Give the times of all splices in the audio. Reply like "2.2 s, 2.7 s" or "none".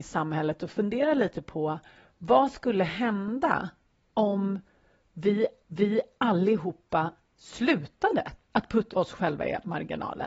5.6 s, 8.4 s, 8.9 s